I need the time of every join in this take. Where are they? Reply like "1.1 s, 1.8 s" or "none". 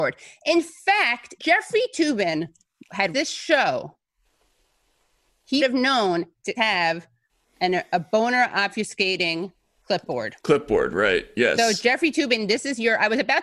1.4 s, 3.1 s, 5.6 s, 6.6 s